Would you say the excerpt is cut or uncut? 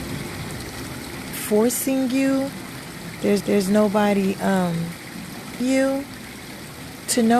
cut